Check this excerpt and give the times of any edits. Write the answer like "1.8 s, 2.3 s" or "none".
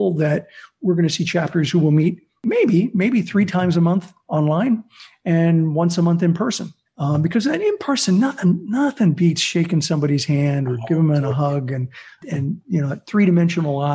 6.9 s